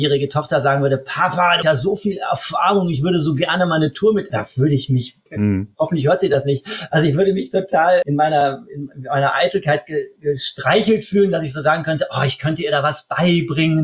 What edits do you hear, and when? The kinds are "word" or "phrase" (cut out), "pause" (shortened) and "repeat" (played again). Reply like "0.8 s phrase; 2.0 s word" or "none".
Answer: 1.6 s word; 4.3 s word; 5.3 s word; 6.9 s word; 8.0 s word

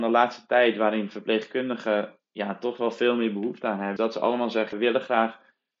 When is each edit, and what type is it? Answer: 4.0 s word; 4.7 s word

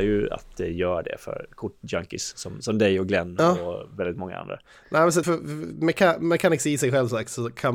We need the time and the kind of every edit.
2.6 s word; 5.2 s word

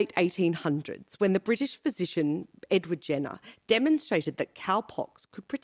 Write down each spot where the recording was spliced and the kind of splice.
none

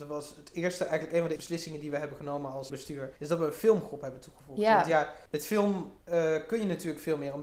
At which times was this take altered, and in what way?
1.4 s word; 2.7 s word; 3.2 s pause; 5.3 s pause; 6.0 s pause

